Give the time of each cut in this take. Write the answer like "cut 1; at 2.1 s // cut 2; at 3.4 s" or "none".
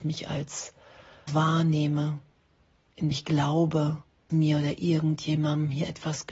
cut 1; at 1.3 s // cut 2; at 3.1 s // cut 3; at 4.3 s